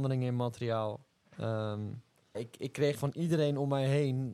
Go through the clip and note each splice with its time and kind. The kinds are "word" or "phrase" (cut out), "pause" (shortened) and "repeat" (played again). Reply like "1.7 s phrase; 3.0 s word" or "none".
2.3 s word; 2.9 s word